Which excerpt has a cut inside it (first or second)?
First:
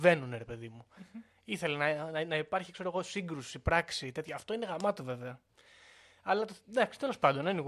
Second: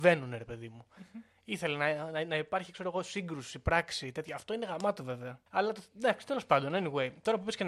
second